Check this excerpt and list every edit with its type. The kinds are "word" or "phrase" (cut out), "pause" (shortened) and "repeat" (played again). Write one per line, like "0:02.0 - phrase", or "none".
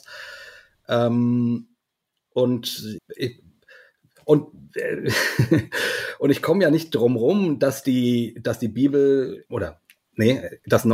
0:03.0 - word
0:09.4 - word